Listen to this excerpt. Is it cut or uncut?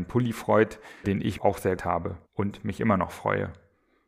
cut